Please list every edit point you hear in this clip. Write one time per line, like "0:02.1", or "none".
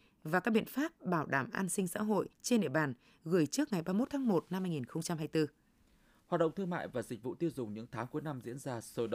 0:02.3